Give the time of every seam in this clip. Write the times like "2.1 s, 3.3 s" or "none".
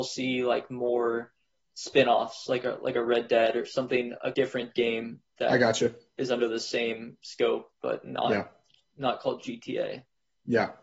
1.6 s, 4.3 s